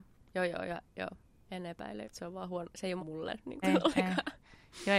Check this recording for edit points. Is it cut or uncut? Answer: cut